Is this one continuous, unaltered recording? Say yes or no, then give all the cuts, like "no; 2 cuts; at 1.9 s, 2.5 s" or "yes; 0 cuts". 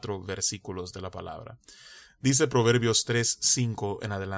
yes; 0 cuts